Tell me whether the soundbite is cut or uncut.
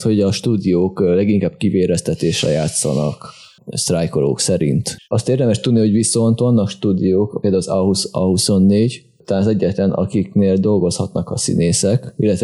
cut